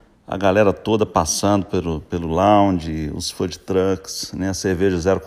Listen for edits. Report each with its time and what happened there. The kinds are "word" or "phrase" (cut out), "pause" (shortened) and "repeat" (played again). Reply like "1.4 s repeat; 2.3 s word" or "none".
none